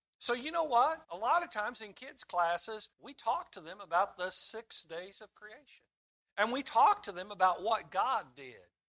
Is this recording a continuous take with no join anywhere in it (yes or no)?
no